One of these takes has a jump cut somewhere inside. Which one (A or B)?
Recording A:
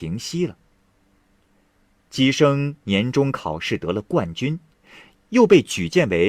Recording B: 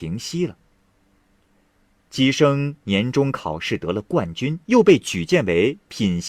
B